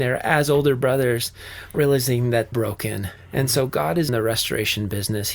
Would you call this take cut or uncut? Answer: cut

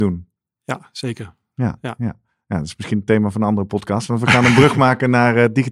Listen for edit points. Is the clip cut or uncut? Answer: uncut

